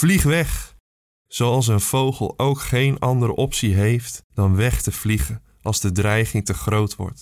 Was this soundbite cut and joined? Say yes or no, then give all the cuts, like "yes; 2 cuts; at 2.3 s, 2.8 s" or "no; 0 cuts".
yes; 1 cut; at 4.3 s